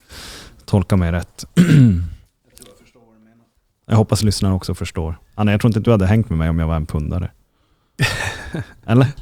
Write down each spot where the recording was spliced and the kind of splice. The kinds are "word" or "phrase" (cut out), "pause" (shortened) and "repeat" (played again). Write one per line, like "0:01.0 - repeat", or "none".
none

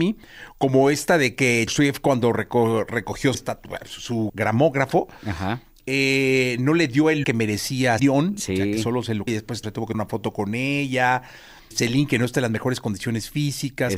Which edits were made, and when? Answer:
0:01.7 - word
0:03.3 - word
0:04.3 - word
0:07.2 - word
0:08.0 - word
0:09.3 - word
0:09.6 - word
0:09.9 - word
0:11.7 - word

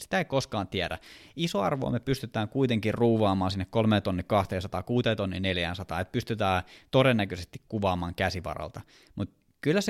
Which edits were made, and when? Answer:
none

